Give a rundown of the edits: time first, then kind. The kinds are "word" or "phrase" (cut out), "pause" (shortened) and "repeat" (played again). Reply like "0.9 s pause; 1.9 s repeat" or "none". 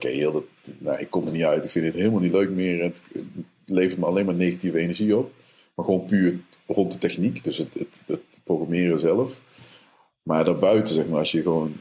none